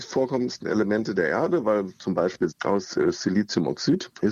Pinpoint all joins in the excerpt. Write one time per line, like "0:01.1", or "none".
0:02.5